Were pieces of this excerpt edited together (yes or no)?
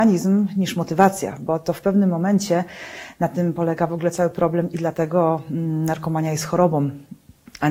no